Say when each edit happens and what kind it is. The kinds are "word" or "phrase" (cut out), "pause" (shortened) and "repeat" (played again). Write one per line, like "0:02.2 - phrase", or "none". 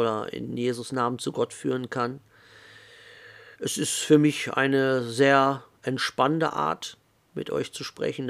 0:03.5 - pause